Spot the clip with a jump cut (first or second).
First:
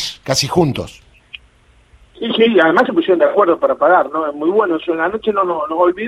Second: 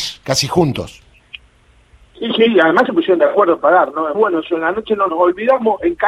second